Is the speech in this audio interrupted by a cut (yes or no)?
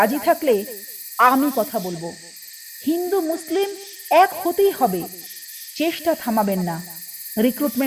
no